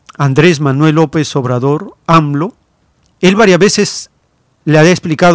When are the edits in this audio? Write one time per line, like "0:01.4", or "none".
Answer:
none